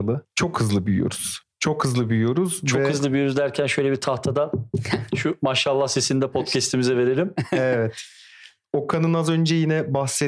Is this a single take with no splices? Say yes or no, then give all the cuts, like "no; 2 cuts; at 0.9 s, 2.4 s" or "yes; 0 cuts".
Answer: yes; 0 cuts